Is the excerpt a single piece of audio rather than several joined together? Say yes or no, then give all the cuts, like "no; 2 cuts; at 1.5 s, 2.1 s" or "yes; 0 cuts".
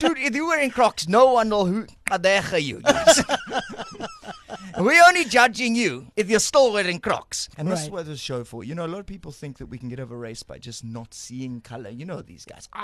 no; 2 cuts; at 6.1 s, 7.5 s